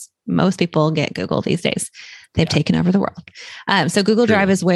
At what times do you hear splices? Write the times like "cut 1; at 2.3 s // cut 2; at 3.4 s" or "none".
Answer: none